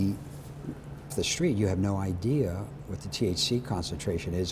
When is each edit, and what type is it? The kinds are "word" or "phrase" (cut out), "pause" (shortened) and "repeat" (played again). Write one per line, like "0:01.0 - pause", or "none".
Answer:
0:01.1 - word

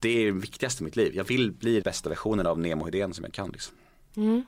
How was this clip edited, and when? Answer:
0:01.8 - word

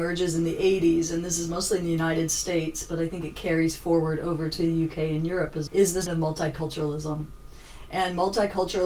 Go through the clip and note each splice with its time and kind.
0:05.7 - word
0:06.1 - word

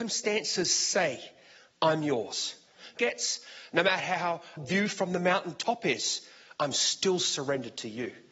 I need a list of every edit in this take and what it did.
0:03.0 - phrase
0:04.6 - phrase

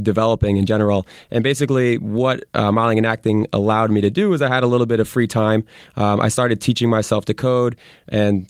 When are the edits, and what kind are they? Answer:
none

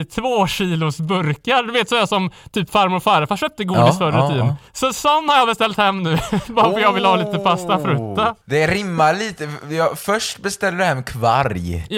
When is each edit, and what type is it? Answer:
0:04.7 - pause
0:08.4 - pause

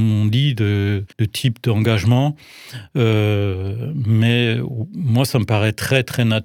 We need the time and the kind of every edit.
0:01.1 - pause

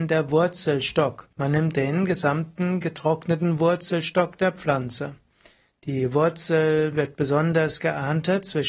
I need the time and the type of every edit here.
0:01.3 - pause

